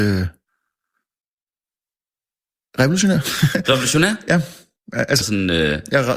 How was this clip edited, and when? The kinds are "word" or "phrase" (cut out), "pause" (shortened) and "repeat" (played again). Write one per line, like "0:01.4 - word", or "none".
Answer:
0:05.2 - word